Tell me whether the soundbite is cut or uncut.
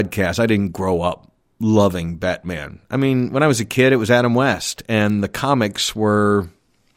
uncut